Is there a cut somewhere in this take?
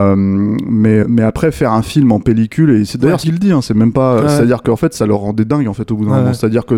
yes; 3 cuts; at 1.0 s, 2.9 s, 3.2 s

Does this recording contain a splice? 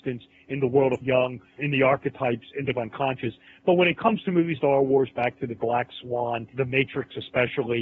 yes; 6 cuts; at 1.0 s, 1.6 s, 2.7 s, 4.6 s, 5.6 s, 6.5 s

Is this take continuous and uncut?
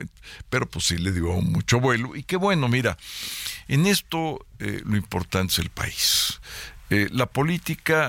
yes; 0 cuts

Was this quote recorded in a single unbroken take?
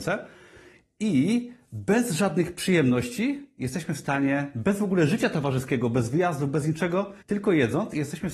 no; 1 cut; at 7.2 s

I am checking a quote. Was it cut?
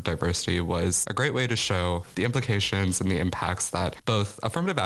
no; 0 cuts

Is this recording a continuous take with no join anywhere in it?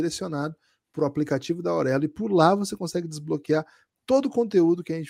yes; 0 cuts

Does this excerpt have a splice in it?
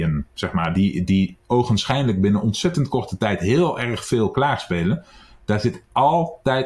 no; 0 cuts

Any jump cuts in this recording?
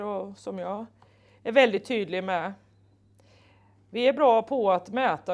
no; 0 cuts

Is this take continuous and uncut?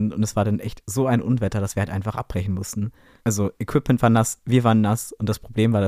yes; 0 cuts

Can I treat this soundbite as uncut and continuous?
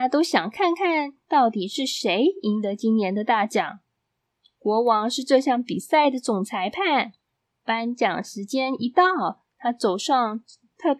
yes; 0 cuts

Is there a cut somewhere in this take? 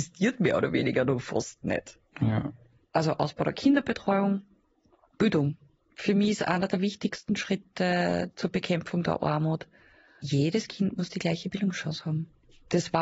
no; 0 cuts

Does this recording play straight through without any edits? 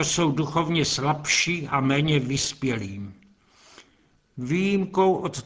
yes; 0 cuts

